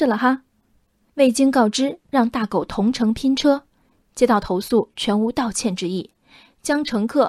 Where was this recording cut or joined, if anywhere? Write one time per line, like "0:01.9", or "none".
none